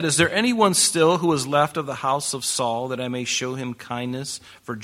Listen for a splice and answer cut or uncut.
uncut